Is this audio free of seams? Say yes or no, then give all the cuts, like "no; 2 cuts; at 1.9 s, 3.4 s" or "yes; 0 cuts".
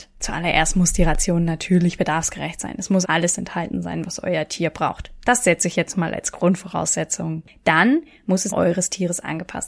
no; 2 cuts; at 3.0 s, 8.5 s